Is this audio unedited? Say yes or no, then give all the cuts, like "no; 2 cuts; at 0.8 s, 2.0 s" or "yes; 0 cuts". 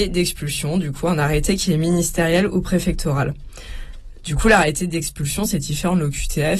yes; 0 cuts